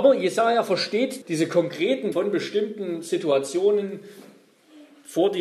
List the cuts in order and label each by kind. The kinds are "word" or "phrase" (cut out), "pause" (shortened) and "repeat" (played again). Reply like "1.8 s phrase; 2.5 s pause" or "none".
1.2 s word; 2.1 s word